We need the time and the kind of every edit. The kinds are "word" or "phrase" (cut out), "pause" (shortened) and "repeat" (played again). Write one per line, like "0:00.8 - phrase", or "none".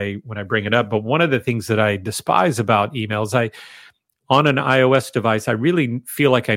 none